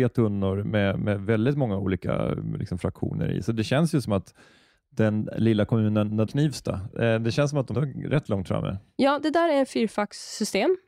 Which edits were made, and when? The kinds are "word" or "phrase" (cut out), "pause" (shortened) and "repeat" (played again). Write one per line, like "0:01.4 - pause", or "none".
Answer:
0:06.3 - phrase
0:07.7 - word